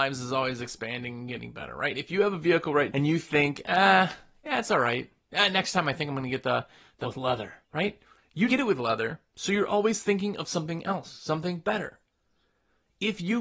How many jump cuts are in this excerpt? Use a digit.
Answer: 4